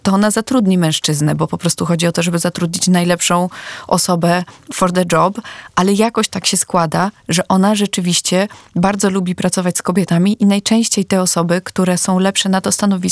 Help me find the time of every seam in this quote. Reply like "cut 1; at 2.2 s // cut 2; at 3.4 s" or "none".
none